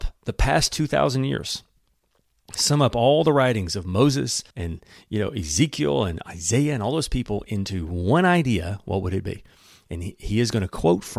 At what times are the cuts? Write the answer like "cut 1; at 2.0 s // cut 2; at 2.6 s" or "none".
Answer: cut 1; at 4.5 s